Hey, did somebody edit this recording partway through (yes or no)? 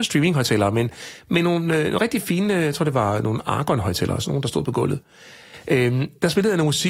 no